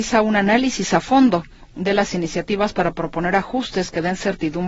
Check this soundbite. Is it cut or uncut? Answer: uncut